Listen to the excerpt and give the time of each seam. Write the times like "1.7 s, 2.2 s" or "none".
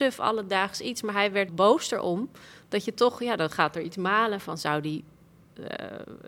1.5 s